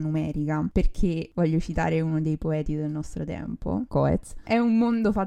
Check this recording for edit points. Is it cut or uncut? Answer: cut